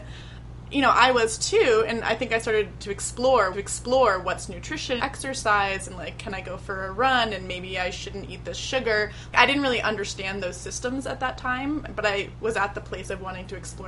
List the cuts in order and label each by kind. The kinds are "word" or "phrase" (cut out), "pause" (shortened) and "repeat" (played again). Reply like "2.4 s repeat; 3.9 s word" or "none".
2.8 s phrase; 3.5 s repeat; 5.0 s phrase